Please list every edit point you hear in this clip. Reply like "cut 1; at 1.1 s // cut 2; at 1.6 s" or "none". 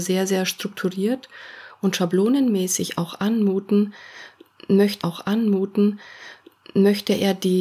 cut 1; at 5.0 s